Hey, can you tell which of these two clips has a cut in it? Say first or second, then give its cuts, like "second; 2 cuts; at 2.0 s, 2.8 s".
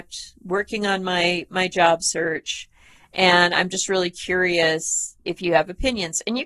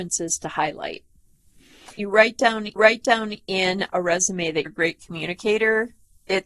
second; 3 cuts; at 2.0 s, 2.8 s, 4.7 s